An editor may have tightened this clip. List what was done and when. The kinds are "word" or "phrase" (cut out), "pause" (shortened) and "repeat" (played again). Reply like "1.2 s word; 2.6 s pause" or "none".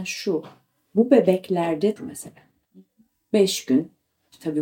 2.0 s phrase